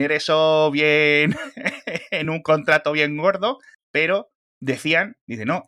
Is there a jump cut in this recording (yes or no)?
no